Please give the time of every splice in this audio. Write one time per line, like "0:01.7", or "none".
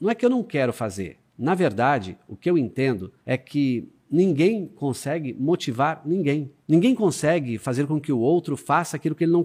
0:01.3
0:03.2
0:06.6